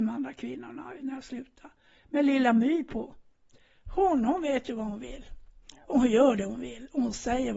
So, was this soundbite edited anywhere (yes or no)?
no